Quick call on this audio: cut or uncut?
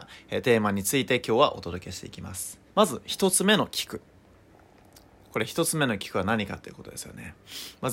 cut